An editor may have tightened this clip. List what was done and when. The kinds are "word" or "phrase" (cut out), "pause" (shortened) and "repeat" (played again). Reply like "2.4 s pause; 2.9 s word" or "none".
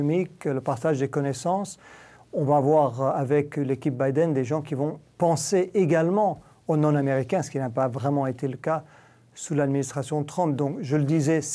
none

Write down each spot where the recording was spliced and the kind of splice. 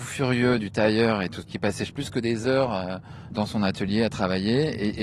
1.4 s word; 1.9 s word; 3.3 s word

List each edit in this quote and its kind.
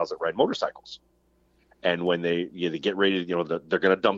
none

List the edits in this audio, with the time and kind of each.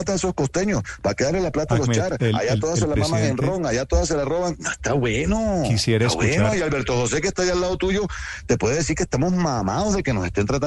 none

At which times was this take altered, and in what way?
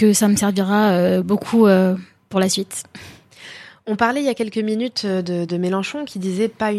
none

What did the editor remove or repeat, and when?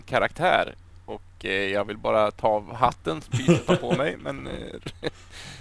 3.3 s phrase

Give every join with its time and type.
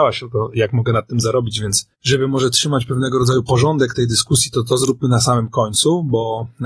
1.9 s pause

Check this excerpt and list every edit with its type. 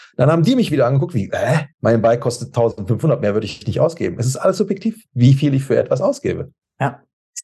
1.7 s pause

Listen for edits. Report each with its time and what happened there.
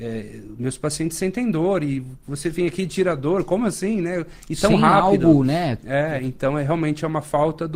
none

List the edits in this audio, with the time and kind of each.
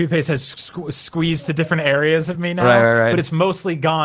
none

